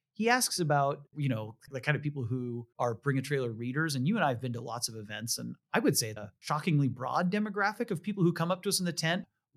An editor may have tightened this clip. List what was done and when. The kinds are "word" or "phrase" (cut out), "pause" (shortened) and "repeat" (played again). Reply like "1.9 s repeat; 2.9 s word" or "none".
6.2 s word